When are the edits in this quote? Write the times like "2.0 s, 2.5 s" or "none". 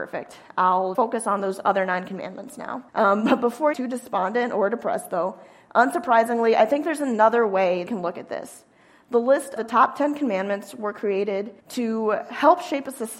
0.9 s, 2.9 s, 3.7 s, 7.9 s, 9.6 s, 11.6 s